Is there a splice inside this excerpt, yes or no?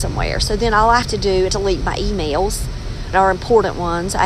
yes